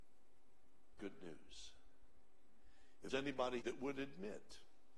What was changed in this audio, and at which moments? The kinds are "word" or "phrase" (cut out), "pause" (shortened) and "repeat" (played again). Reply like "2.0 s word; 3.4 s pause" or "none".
1.0 s phrase; 3.1 s word; 3.6 s phrase